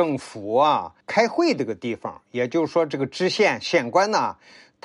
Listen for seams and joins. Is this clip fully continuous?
no; 1 cut; at 1.0 s

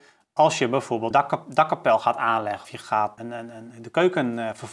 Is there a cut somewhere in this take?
yes; 3 cuts; at 1.1 s, 2.6 s, 3.2 s

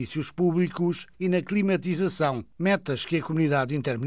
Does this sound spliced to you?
no; 0 cuts

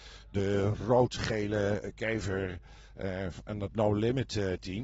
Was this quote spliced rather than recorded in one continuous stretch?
no; 0 cuts

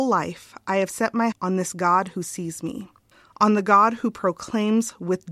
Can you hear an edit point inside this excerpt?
yes; 2 cuts; at 1.3 s, 3.1 s

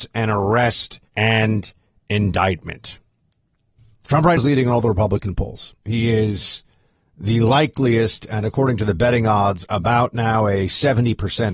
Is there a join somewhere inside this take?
yes; 4 cuts; at 1.1 s, 3.8 s, 4.4 s, 5.8 s

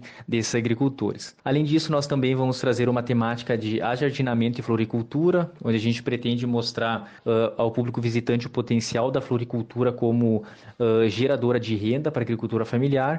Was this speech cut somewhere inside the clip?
yes; 2 cuts; at 1.4 s, 7.2 s

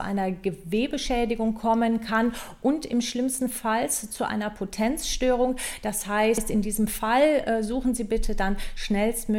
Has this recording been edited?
no; 0 cuts

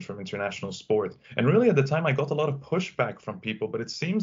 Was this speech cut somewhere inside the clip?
yes; 1 cut; at 1.2 s

